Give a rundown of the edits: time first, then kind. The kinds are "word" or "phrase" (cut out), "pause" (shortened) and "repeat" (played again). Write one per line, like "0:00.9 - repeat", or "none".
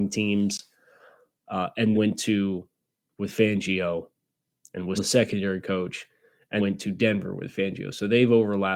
0:01.9 - word
0:03.1 - word
0:05.0 - word
0:06.6 - word